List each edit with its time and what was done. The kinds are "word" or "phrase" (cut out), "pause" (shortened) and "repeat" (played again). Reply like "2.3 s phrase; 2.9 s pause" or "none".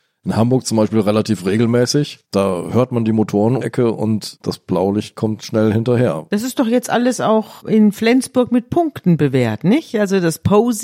2.2 s pause; 3.6 s word